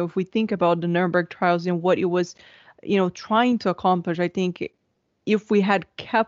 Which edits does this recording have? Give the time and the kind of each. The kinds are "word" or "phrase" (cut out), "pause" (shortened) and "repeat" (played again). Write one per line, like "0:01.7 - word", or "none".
none